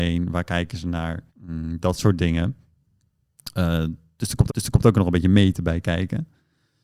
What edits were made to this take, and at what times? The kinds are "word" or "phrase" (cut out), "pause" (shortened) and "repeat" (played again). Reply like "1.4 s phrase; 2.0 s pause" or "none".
1.3 s pause; 4.5 s repeat